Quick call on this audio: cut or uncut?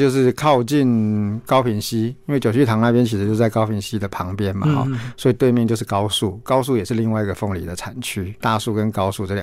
uncut